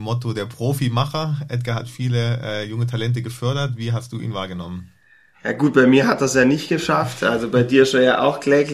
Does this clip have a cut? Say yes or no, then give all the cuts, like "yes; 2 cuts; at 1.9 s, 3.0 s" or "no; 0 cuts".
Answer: no; 0 cuts